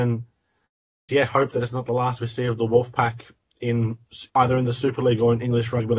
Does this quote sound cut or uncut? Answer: cut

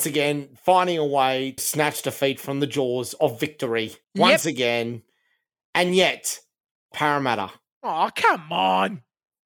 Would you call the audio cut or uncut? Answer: cut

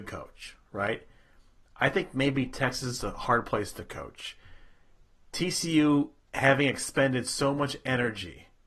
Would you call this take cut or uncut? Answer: uncut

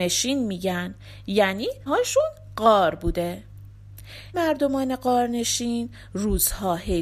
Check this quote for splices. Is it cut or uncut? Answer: cut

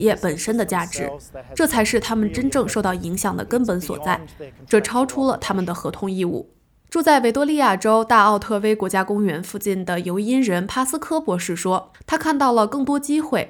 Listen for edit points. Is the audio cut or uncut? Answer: uncut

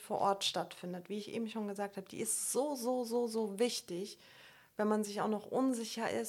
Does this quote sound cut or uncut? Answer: uncut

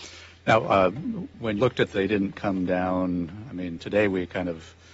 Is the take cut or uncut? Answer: cut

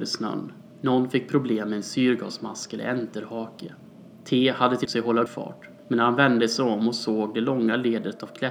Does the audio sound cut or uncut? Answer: cut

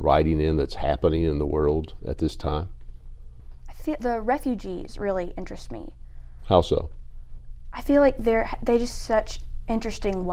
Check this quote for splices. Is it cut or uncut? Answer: cut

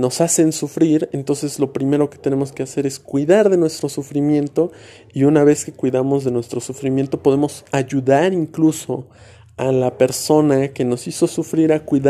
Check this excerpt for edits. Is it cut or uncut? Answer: uncut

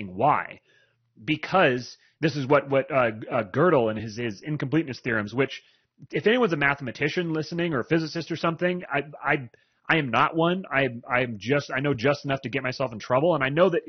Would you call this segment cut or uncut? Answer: uncut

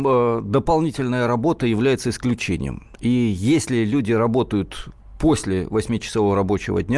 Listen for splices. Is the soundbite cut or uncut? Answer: uncut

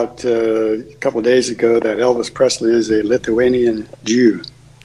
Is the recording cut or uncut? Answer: uncut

